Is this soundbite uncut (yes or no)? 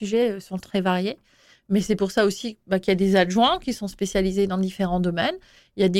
yes